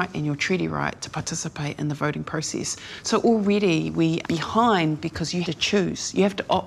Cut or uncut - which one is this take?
cut